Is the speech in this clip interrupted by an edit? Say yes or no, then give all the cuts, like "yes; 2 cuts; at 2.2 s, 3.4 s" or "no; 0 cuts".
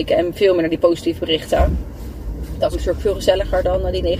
yes; 1 cut; at 2.7 s